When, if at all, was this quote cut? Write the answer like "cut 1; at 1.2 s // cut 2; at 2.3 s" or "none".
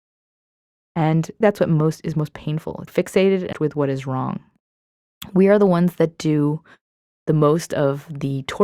cut 1; at 1.4 s // cut 2; at 2.9 s // cut 3; at 3.5 s